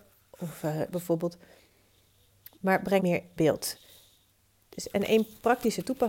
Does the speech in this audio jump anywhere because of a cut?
yes; 3 cuts; at 0.9 s, 3.0 s, 3.4 s

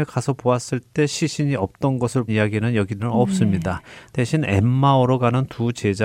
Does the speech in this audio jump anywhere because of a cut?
yes; 2 cuts; at 2.3 s, 3.0 s

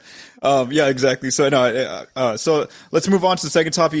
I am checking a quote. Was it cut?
no; 0 cuts

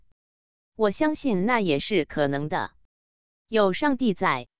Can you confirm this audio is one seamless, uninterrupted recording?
yes; 0 cuts

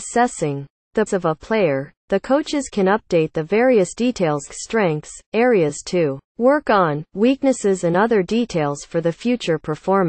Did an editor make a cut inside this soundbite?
yes; 3 cuts; at 1.1 s, 4.5 s, 6.3 s

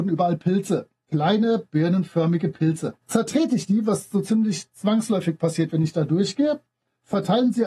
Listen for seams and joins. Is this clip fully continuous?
no; 1 cut; at 3.0 s

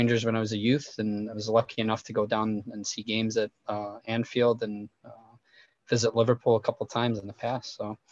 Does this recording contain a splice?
no; 0 cuts

